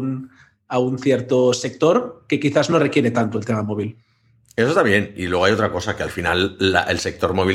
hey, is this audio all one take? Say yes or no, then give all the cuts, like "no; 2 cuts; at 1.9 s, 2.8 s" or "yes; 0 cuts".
yes; 0 cuts